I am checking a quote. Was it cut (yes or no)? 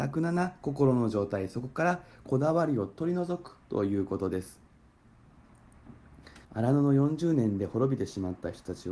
yes